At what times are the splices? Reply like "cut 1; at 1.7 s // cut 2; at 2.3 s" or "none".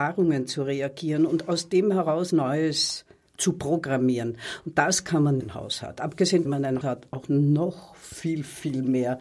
cut 1; at 2.3 s // cut 2; at 5.4 s // cut 3; at 6.4 s // cut 4; at 6.8 s